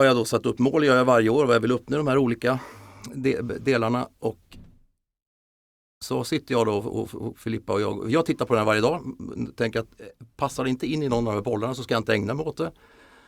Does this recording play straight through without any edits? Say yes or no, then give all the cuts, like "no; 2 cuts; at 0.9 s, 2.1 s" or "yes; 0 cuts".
yes; 0 cuts